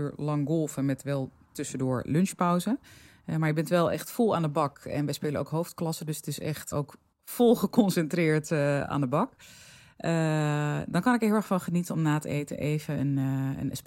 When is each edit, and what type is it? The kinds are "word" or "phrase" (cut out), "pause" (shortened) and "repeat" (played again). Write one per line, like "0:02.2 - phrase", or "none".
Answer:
0:06.7 - word